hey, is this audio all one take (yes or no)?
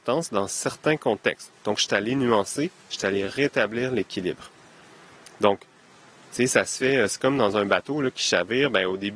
yes